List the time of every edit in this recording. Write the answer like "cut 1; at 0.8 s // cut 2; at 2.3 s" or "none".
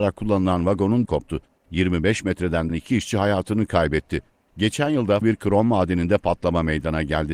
cut 1; at 1.1 s // cut 2; at 2.7 s // cut 3; at 5.2 s

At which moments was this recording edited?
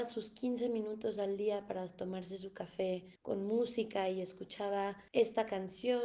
cut 1; at 3.2 s // cut 2; at 5.1 s

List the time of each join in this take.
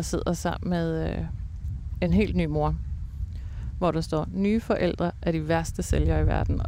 none

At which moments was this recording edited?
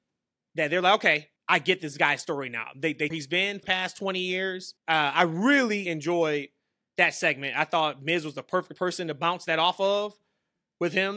cut 1; at 1.4 s // cut 2; at 3.1 s // cut 3; at 3.6 s // cut 4; at 4.8 s // cut 5; at 5.9 s

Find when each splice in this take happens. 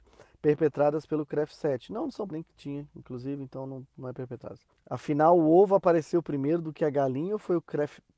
cut 1; at 2.3 s // cut 2; at 4.7 s

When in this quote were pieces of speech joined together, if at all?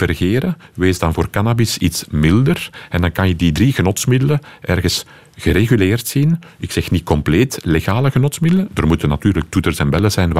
none

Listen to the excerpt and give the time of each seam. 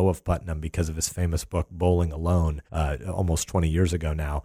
cut 1; at 2.7 s

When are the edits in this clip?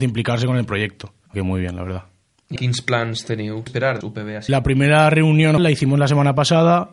cut 1; at 1.3 s // cut 2; at 2.6 s // cut 3; at 3.7 s // cut 4; at 4.0 s // cut 5; at 4.5 s // cut 6; at 5.6 s

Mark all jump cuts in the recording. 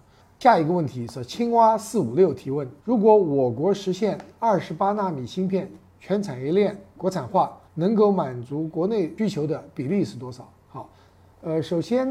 cut 1; at 2.8 s // cut 2; at 7.7 s // cut 3; at 10.6 s

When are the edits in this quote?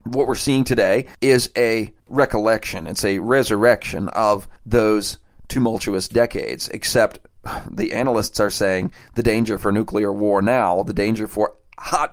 cut 1; at 1.1 s // cut 2; at 2.0 s // cut 3; at 4.6 s

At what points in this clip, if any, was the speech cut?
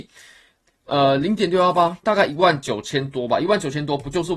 none

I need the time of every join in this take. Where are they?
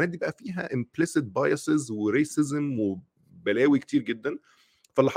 none

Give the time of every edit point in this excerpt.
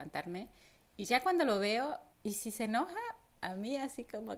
cut 1; at 2.1 s

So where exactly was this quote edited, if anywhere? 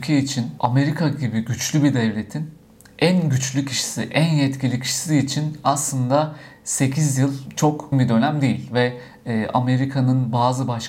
cut 1; at 7.9 s

